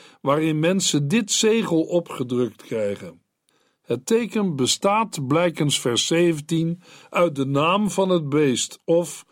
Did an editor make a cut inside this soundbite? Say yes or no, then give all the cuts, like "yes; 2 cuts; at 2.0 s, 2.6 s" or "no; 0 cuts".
no; 0 cuts